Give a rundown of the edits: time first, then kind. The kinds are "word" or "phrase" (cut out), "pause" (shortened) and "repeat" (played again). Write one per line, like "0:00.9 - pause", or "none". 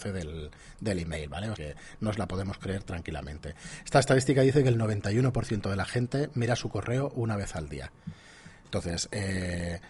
0:01.6 - word